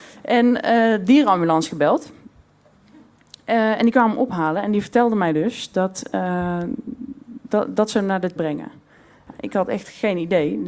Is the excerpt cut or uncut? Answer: cut